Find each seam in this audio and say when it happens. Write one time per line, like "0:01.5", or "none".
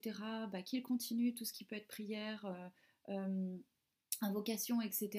none